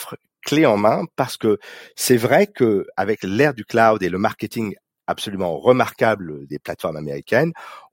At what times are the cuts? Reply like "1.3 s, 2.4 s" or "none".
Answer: none